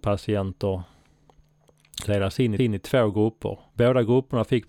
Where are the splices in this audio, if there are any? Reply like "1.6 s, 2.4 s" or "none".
2.1 s, 2.6 s, 3.7 s